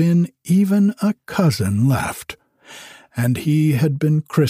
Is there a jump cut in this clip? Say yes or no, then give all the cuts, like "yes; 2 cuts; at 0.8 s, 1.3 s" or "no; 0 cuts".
no; 0 cuts